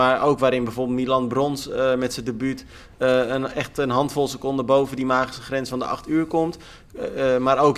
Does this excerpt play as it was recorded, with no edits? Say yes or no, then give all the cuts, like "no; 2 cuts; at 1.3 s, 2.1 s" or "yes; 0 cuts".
yes; 0 cuts